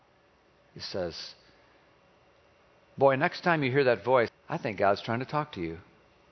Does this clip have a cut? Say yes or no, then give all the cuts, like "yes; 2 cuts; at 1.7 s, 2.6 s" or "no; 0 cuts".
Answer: yes; 1 cut; at 4.3 s